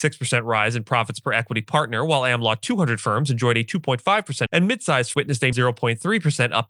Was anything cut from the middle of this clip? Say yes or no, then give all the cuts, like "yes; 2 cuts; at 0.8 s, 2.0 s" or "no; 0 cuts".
yes; 3 cuts; at 4.5 s, 5.1 s, 5.5 s